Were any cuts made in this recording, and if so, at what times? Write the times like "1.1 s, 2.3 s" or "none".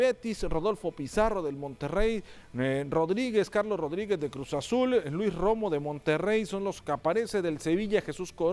none